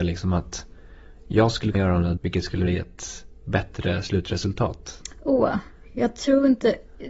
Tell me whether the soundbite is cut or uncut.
cut